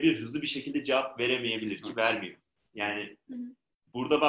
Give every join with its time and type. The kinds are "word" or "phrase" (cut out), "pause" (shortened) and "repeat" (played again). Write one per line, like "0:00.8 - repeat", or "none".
none